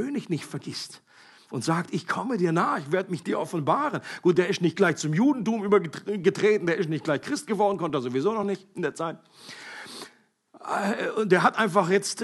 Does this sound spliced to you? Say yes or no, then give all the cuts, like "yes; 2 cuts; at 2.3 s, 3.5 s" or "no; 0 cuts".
no; 0 cuts